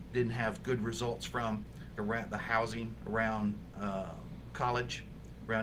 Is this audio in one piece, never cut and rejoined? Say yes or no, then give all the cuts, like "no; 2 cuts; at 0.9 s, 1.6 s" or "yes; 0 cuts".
no; 1 cut; at 2.0 s